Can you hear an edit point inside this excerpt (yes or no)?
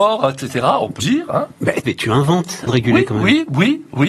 yes